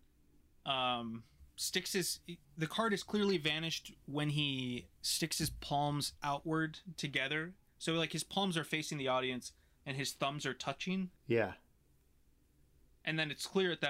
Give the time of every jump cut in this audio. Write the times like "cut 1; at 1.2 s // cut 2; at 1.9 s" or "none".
cut 1; at 1.5 s // cut 2; at 2.4 s // cut 3; at 11.2 s